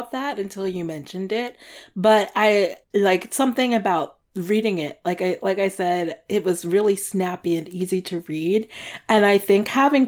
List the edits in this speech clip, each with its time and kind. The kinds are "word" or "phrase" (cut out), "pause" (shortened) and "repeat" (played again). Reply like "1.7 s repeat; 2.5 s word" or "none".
2.8 s pause

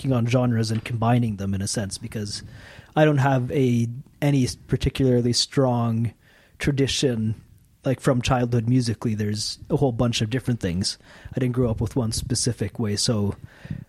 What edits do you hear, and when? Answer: none

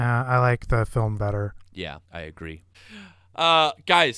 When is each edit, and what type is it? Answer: 1.2 s word; 2.1 s pause

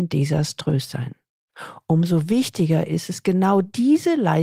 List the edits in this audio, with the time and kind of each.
none

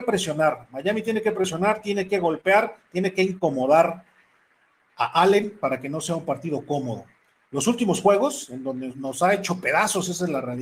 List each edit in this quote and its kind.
none

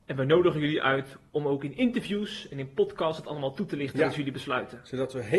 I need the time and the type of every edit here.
none

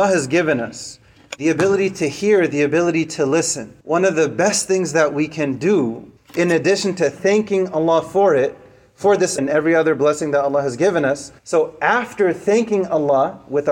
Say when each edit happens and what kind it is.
3.8 s pause; 6.2 s pause; 9.4 s word; 11.4 s pause

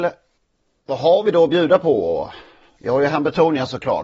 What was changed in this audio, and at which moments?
none

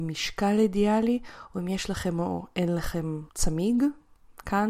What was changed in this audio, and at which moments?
3.3 s pause

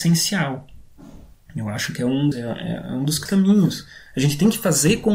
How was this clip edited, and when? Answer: 2.3 s word; 3.3 s word

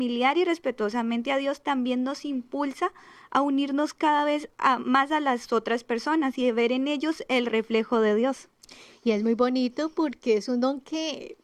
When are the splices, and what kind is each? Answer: none

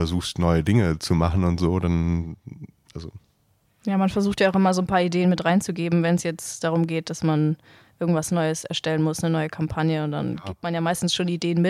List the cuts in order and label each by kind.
none

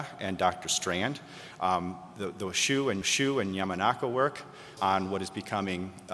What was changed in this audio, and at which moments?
3.0 s repeat; 4.8 s word

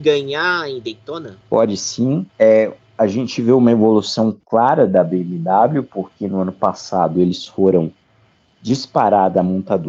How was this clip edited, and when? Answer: 1.4 s pause; 2.3 s pause

